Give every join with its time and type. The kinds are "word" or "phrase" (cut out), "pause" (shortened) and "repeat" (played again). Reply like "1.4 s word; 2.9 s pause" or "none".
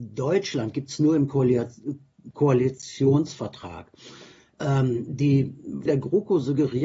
5.9 s word